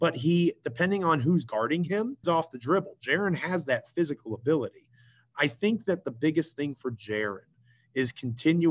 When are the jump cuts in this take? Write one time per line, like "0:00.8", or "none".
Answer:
0:02.2